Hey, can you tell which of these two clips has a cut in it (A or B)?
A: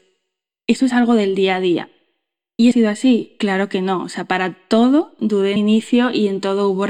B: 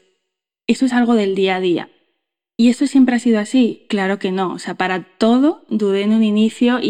A